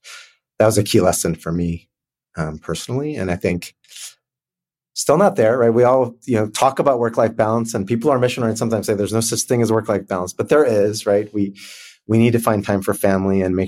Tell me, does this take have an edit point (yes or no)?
no